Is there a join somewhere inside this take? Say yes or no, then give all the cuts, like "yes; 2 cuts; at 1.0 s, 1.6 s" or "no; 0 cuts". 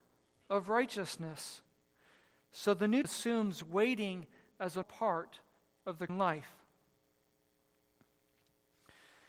yes; 3 cuts; at 3.0 s, 4.8 s, 6.1 s